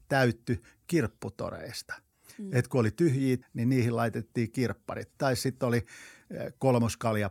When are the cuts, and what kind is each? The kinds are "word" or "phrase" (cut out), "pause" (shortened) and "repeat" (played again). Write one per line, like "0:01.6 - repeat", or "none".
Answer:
0:02.1 - pause
0:03.4 - word